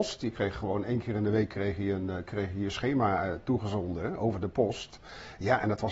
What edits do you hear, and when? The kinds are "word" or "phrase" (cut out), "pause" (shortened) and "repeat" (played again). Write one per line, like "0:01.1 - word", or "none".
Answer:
none